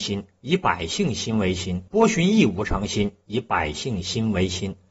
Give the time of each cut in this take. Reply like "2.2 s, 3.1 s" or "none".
1.9 s